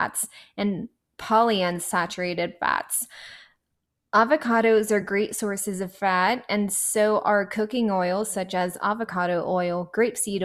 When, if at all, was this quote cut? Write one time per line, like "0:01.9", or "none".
none